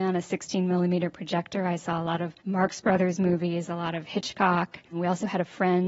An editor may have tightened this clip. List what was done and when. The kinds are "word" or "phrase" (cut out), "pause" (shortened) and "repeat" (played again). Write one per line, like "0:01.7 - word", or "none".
0:02.4 - pause
0:04.9 - pause

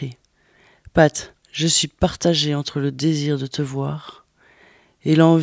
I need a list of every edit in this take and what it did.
0:01.4 - pause

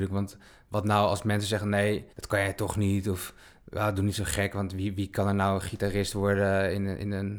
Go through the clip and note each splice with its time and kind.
0:02.1 - pause

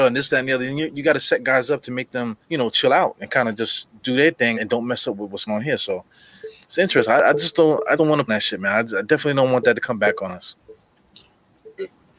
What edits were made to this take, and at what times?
0:02.4 - pause
0:04.5 - word
0:05.5 - word
0:08.0 - word
0:08.3 - phrase

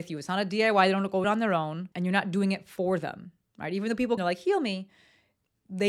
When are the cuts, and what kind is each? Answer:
0:01.2 - phrase
0:01.9 - pause
0:04.2 - phrase

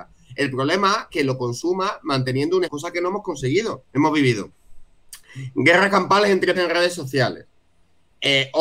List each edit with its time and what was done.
0:01.1 - word
0:02.6 - phrase
0:03.9 - pause
0:06.5 - word

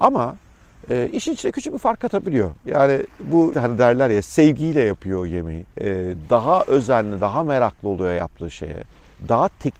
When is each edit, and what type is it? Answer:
0:03.5 - word
0:05.7 - pause

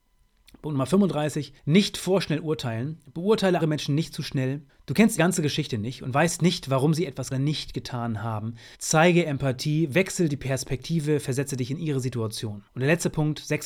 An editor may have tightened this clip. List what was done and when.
0:01.6 - pause
0:03.6 - word
0:04.7 - pause
0:05.2 - word
0:07.3 - phrase
0:08.7 - pause
0:12.7 - pause

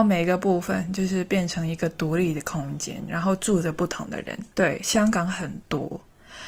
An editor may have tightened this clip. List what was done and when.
0:04.5 - pause

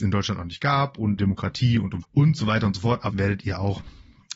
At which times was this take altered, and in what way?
0:01.2 - word
0:02.0 - word
0:03.1 - word

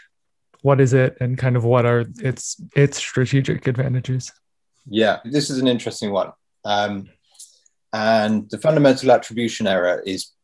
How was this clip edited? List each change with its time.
0:02.7 - pause
0:05.2 - word

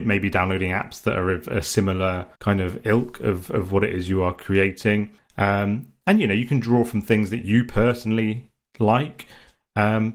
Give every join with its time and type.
0:02.4 - pause
0:05.2 - pause

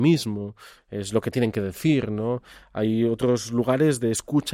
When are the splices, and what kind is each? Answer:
none

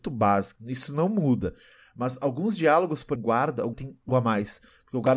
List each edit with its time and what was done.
0:03.2 - phrase
0:03.7 - word
0:04.1 - word

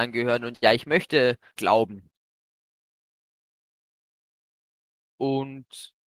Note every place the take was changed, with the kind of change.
0:01.6 - word

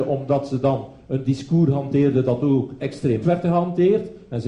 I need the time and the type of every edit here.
0:02.8 - word
0:03.2 - word

